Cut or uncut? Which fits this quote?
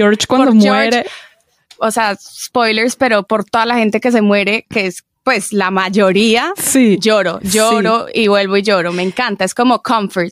uncut